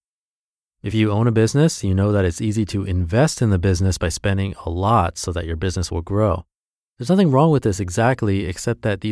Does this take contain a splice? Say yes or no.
no